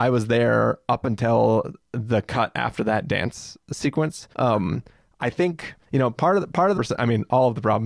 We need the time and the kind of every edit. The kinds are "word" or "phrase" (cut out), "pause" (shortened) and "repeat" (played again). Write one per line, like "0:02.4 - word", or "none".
0:01.8 - pause
0:04.3 - pause
0:05.8 - pause
0:06.7 - phrase